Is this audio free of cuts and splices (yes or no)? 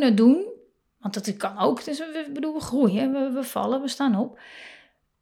yes